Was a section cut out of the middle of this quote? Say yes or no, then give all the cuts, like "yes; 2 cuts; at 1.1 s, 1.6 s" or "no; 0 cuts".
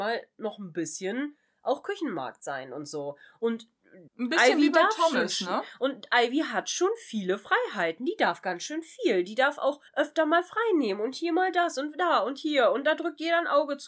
yes; 2 cuts; at 4.1 s, 9.9 s